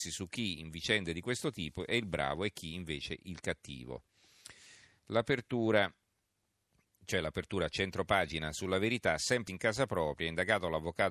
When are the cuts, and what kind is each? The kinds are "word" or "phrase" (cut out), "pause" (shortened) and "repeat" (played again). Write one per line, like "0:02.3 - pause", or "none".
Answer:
0:09.5 - phrase